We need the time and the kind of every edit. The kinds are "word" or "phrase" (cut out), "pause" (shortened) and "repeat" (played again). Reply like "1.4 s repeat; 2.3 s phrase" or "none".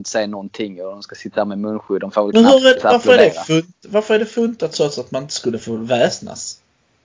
none